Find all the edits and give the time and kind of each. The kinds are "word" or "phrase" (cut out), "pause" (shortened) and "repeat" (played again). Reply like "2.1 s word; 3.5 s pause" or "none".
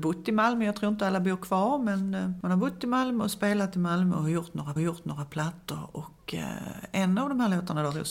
4.8 s repeat